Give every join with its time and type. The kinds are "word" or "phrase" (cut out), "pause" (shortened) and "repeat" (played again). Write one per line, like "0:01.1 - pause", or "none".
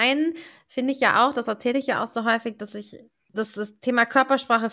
0:03.3 - word